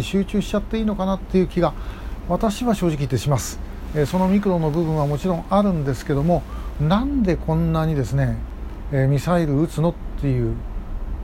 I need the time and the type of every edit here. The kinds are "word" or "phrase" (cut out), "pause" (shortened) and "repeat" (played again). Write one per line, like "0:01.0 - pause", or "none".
none